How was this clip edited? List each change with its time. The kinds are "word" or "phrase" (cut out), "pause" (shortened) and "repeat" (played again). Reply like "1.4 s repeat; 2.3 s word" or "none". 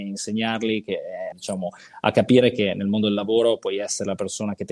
1.3 s word